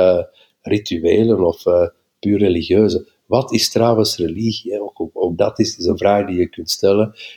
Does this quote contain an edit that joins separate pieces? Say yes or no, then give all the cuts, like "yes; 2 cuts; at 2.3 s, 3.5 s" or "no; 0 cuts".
no; 0 cuts